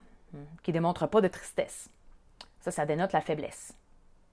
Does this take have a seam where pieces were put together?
no; 0 cuts

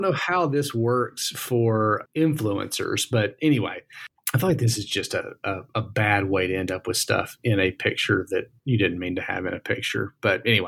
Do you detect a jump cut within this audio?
yes; 1 cut; at 8.6 s

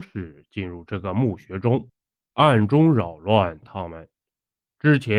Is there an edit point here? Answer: no; 0 cuts

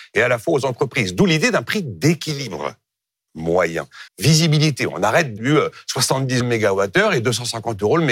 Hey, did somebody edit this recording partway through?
yes; 3 cuts; at 4.1 s, 5.4 s, 6.4 s

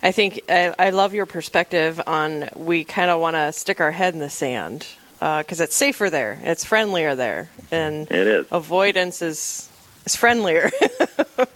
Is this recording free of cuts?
yes; 0 cuts

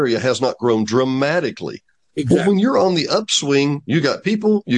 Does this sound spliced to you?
no; 0 cuts

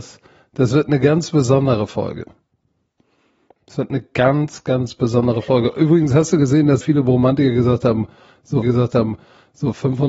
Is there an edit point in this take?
yes; 2 cuts; at 6.8 s, 8.6 s

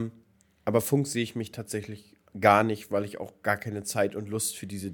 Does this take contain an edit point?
no; 0 cuts

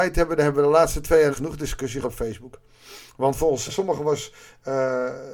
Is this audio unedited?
no; 4 cuts; at 1.3 s, 2.0 s, 3.1 s, 3.7 s

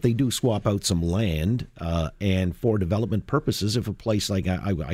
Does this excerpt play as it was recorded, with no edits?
yes; 0 cuts

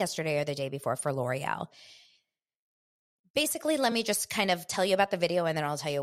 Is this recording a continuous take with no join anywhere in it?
yes; 0 cuts

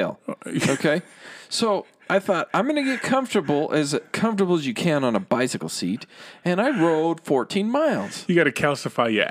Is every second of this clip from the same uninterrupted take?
yes; 0 cuts

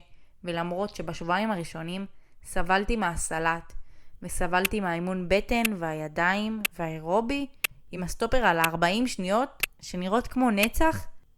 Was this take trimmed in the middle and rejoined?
no; 0 cuts

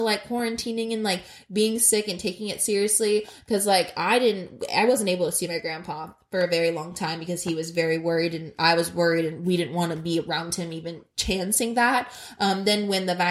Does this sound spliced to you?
yes; 1 cut; at 11.1 s

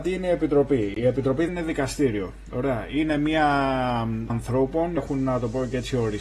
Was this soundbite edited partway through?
yes; 3 cuts; at 1.5 s, 4.3 s, 5.0 s

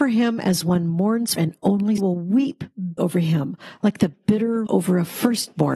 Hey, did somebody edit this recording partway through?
yes; 4 cuts; at 1.4 s, 2.0 s, 3.0 s, 4.7 s

